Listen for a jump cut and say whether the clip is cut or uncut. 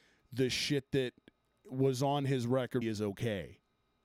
cut